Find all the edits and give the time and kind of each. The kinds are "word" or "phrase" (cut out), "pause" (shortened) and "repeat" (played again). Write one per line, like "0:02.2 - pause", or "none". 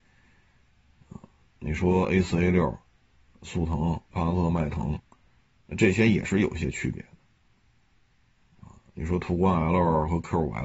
0:01.4 - pause
0:04.0 - pause